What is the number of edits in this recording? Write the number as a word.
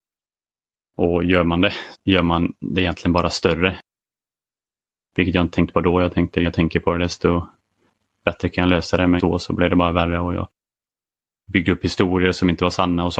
three